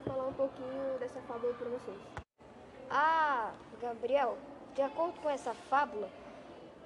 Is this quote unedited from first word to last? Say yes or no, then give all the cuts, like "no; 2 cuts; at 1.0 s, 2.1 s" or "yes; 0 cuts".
yes; 0 cuts